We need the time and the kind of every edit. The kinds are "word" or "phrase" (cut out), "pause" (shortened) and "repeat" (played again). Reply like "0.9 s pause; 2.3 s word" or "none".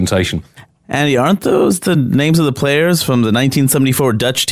none